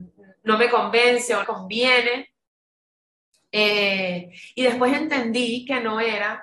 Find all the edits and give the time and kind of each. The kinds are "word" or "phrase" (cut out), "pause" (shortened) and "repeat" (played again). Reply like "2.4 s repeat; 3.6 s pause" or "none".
1.4 s phrase